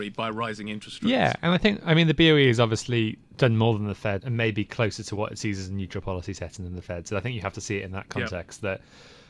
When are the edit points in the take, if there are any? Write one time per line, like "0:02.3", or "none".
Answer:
0:04.2